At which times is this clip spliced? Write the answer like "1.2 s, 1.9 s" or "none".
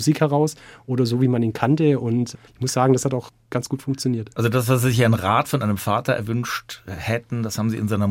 2.5 s